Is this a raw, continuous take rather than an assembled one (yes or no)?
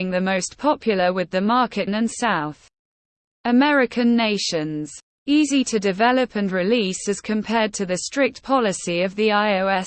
no